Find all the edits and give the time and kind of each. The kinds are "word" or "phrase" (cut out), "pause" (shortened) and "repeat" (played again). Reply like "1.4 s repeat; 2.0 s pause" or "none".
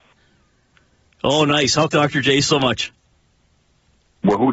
1.9 s phrase